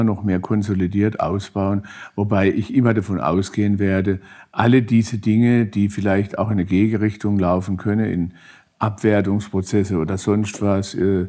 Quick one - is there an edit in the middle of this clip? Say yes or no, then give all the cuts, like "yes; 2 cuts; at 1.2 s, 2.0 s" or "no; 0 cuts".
no; 0 cuts